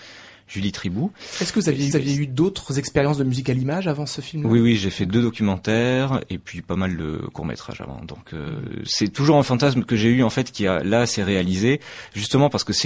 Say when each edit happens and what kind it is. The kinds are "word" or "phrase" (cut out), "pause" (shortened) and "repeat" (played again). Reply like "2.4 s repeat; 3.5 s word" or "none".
1.9 s repeat